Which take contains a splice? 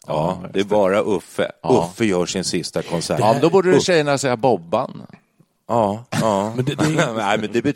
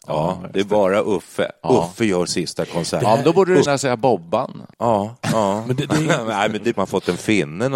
second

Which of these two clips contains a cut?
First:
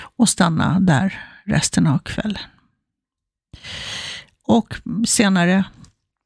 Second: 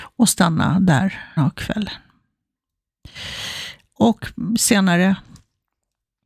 second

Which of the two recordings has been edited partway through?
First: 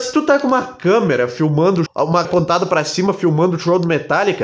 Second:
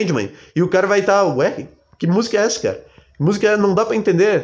first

